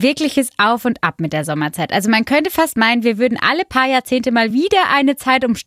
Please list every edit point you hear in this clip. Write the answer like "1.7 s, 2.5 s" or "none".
none